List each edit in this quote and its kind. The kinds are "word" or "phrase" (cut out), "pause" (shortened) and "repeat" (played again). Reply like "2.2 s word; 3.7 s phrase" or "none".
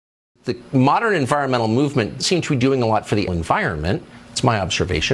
2.2 s word; 3.3 s word